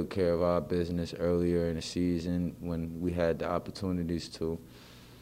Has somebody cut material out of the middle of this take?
no; 0 cuts

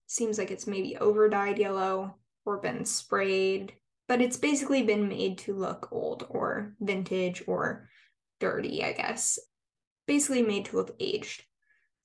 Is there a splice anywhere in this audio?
no; 0 cuts

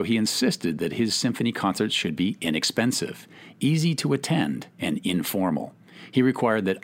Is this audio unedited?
yes; 0 cuts

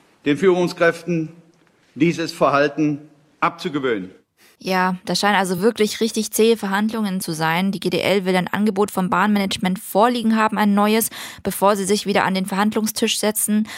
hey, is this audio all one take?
yes; 0 cuts

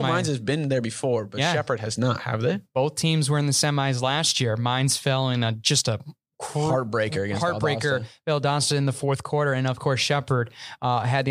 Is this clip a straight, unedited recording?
yes; 0 cuts

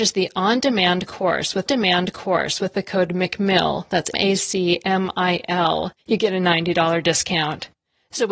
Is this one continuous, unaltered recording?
no; 3 cuts; at 1.7 s, 4.1 s, 6.0 s

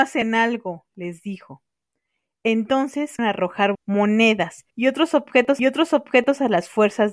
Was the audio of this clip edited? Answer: yes; 4 cuts; at 3.2 s, 3.7 s, 4.7 s, 5.6 s

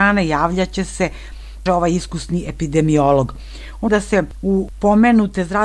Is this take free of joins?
no; 3 cuts; at 1.7 s, 3.9 s, 4.7 s

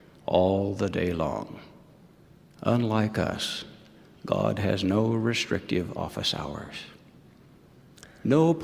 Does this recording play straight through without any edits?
yes; 0 cuts

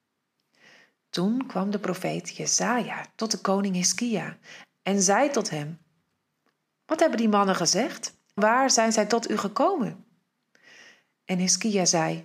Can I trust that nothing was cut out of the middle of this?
no; 1 cut; at 8.4 s

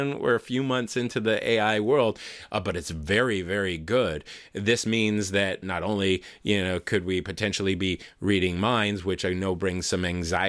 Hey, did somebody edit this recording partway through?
yes; 1 cut; at 5.6 s

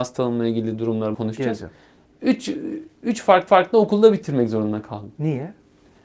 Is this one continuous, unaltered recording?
no; 2 cuts; at 1.1 s, 3.5 s

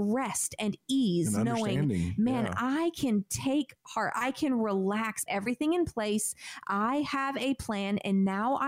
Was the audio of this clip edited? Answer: yes; 1 cut; at 5.3 s

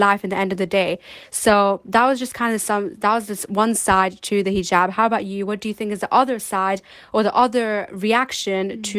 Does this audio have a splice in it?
no; 0 cuts

